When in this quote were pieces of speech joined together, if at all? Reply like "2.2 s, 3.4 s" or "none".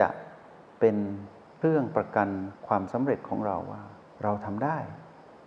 2.6 s, 4.0 s